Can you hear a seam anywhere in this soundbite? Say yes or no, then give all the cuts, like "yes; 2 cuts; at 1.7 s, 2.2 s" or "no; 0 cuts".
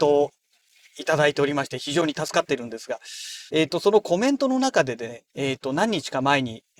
yes; 2 cuts; at 3.5 s, 5.3 s